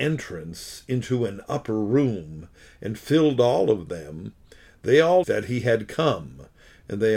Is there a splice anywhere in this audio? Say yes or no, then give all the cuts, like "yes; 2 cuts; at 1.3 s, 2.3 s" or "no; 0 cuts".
yes; 1 cut; at 5.2 s